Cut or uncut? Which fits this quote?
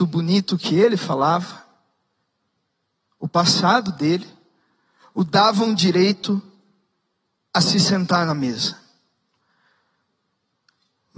uncut